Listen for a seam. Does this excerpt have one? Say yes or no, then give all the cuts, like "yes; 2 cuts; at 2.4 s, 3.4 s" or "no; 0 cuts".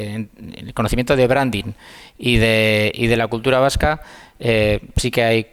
no; 0 cuts